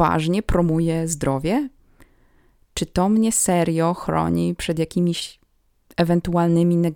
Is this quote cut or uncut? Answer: uncut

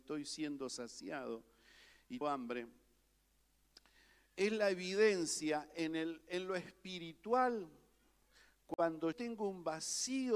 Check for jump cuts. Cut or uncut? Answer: cut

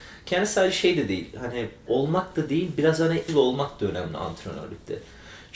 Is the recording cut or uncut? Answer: cut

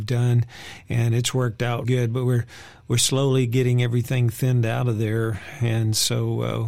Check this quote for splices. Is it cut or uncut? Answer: cut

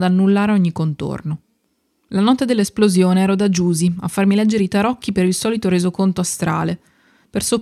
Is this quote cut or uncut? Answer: uncut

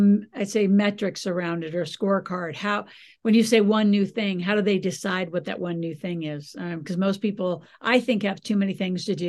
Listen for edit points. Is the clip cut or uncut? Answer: uncut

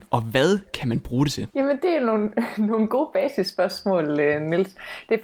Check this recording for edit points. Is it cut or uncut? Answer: cut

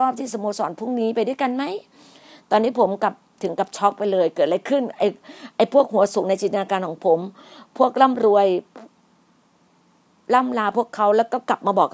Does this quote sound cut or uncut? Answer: uncut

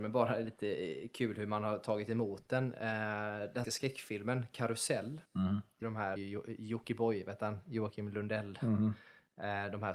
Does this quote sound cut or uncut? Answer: cut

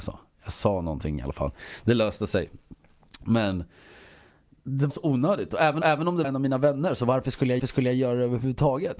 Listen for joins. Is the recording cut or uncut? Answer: cut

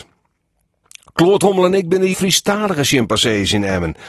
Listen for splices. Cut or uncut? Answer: cut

